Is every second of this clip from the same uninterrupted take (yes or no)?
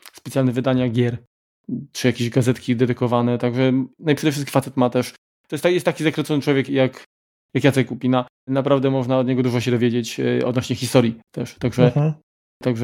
no